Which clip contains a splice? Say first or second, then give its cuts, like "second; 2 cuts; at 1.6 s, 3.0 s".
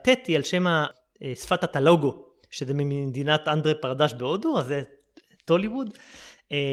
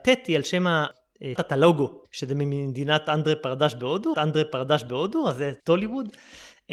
second; 4 cuts; at 1.4 s, 2.0 s, 4.1 s, 5.6 s